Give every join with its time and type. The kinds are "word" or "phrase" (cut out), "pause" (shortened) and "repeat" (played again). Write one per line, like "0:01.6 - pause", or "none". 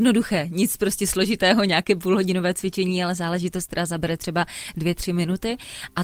none